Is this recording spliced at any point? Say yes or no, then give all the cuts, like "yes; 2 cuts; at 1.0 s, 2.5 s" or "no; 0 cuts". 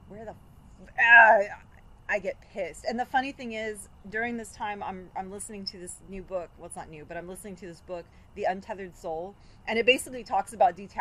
no; 0 cuts